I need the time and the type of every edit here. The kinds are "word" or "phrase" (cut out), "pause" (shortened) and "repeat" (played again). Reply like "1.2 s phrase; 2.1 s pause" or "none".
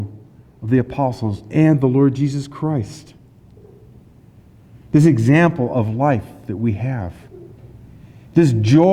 none